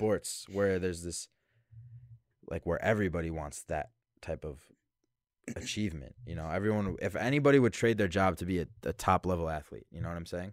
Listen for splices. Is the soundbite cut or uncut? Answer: uncut